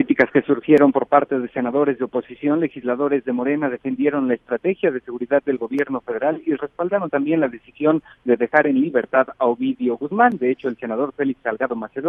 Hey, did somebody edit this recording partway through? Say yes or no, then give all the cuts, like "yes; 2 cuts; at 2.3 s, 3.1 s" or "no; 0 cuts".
no; 0 cuts